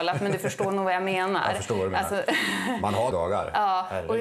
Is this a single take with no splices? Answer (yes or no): no